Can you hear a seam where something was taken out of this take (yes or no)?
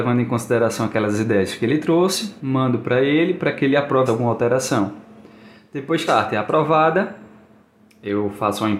yes